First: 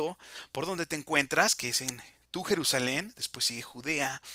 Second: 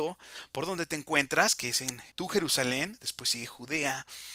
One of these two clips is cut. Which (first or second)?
second